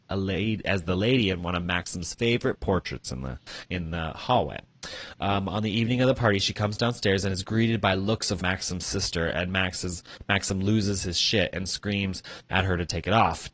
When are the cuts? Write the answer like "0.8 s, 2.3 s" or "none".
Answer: 8.4 s